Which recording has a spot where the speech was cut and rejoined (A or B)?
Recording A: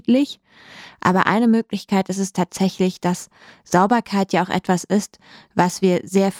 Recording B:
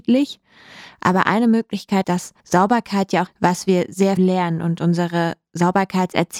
B